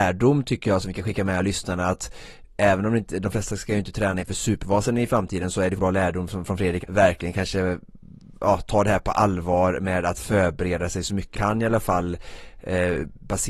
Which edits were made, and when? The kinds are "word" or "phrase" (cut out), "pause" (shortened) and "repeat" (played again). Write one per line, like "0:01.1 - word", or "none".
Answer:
0:05.8 - word
0:06.8 - word
0:11.3 - word

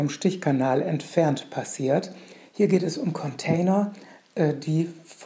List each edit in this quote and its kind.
none

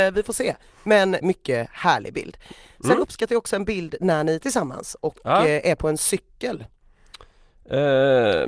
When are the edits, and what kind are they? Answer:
0:01.2 - word
0:04.4 - word

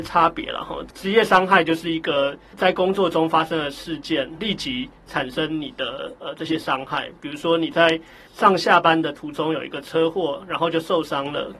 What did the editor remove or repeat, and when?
0:04.4 - word

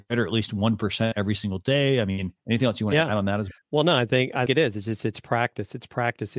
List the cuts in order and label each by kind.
0:02.4 - pause
0:03.6 - pause
0:04.5 - word

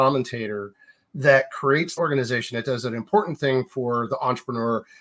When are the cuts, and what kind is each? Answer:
0:02.0 - phrase

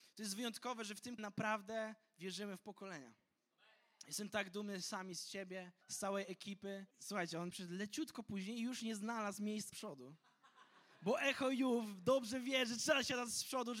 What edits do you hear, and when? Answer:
0:01.2 - word
0:05.8 - pause
0:06.9 - pause
0:07.5 - word
0:09.7 - word

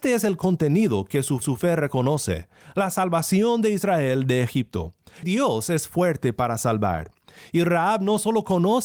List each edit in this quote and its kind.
0:01.4 - repeat
0:05.2 - word

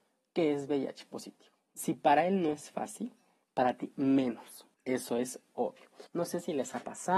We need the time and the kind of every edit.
0:04.7 - pause
0:06.1 - pause

